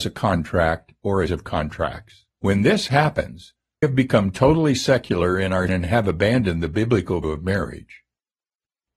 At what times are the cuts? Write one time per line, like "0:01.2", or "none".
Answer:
0:01.3
0:02.3
0:03.8
0:05.7
0:07.2